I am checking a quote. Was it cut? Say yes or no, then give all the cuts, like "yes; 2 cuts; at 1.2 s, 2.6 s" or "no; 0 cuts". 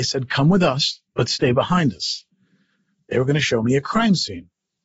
no; 0 cuts